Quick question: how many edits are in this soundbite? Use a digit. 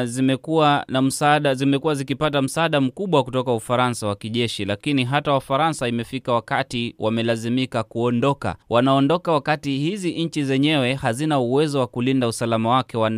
1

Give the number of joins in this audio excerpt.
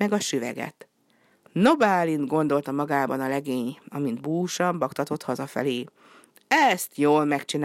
1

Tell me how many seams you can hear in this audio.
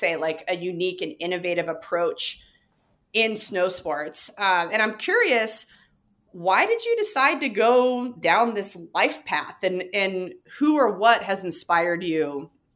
0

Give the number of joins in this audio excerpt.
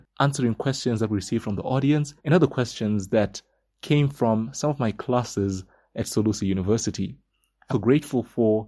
2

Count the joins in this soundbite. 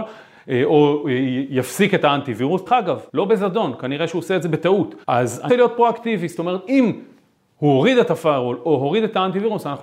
4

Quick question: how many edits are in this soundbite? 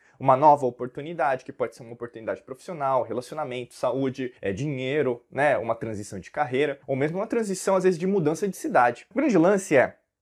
3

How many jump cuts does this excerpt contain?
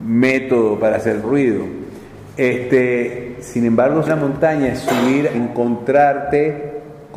3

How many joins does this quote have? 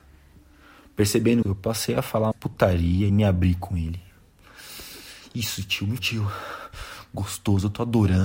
4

